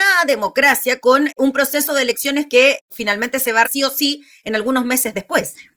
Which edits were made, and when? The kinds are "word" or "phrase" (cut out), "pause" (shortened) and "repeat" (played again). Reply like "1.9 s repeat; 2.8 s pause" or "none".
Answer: 3.6 s word